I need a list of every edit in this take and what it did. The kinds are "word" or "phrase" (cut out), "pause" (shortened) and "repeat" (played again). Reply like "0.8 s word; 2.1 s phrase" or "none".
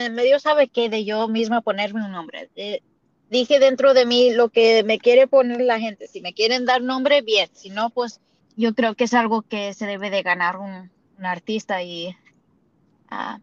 8.4 s pause